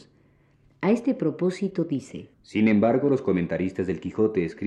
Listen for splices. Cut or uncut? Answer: cut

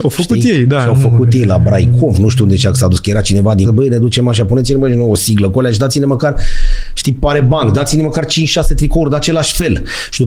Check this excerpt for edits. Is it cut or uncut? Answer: cut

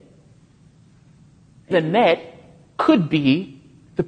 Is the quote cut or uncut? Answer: cut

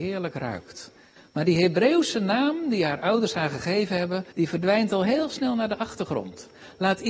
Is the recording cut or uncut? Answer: cut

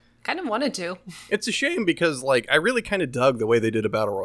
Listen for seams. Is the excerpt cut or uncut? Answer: uncut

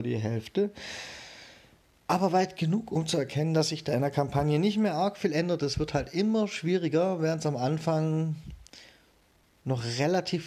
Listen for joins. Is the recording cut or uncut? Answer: uncut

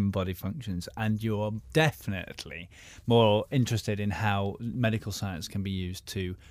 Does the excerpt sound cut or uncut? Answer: uncut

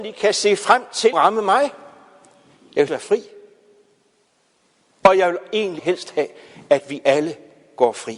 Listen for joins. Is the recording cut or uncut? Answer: cut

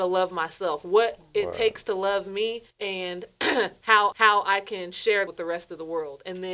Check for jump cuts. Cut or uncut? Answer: cut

